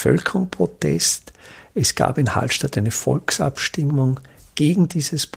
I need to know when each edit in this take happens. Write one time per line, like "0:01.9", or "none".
none